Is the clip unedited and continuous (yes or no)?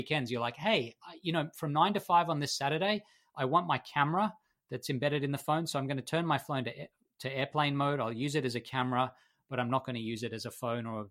yes